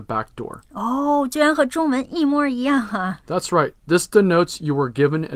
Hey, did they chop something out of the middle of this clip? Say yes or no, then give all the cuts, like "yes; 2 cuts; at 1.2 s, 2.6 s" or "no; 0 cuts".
yes; 1 cut; at 3.2 s